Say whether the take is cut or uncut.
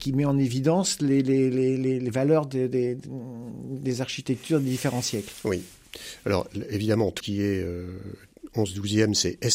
cut